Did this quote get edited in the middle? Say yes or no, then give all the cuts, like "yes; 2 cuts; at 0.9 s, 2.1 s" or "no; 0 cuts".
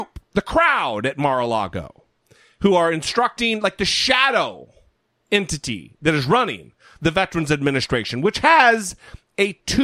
no; 0 cuts